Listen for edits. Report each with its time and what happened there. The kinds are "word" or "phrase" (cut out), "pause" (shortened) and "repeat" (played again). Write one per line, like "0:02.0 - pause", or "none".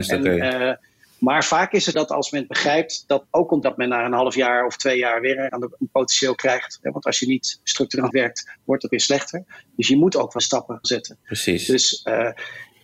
0:01.9 - word
0:03.3 - word
0:03.6 - word
0:05.5 - word
0:08.1 - word
0:08.9 - word
0:10.4 - word
0:10.8 - word